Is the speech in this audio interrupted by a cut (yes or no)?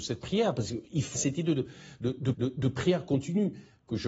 yes